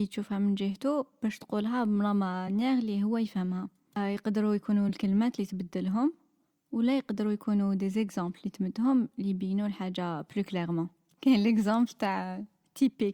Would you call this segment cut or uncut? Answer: uncut